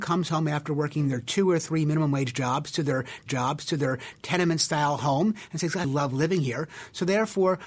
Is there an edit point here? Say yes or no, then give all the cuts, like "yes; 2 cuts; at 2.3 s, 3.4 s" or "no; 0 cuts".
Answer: yes; 2 cuts; at 3.3 s, 5.8 s